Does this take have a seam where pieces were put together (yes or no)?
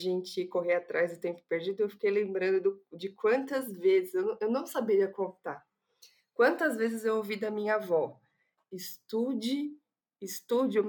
no